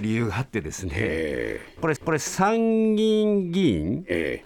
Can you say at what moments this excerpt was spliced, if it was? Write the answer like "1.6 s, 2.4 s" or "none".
2.0 s

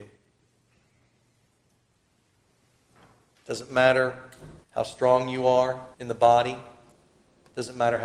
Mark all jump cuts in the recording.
4.6 s, 5.9 s

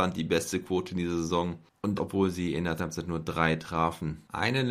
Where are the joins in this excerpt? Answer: 2.0 s, 2.8 s

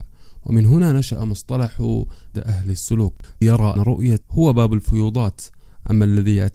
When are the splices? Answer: 2.3 s, 3.4 s, 3.8 s, 4.2 s

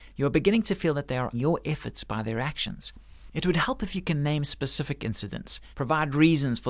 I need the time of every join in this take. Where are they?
1.3 s, 5.7 s

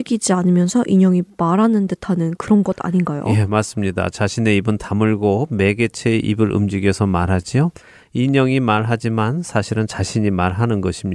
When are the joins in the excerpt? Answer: none

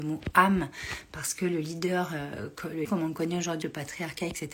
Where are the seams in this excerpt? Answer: 2.8 s, 3.6 s

